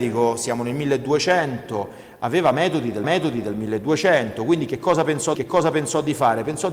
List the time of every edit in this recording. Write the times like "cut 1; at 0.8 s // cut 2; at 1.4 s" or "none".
cut 1; at 3.0 s // cut 2; at 5.3 s